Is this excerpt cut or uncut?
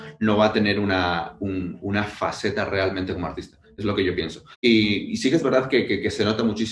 cut